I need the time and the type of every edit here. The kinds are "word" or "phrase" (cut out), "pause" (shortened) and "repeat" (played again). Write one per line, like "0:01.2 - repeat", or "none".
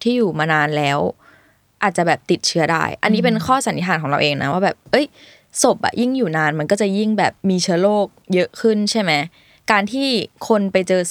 0:07.4 - pause